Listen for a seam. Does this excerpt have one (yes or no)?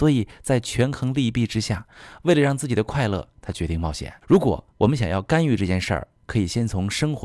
yes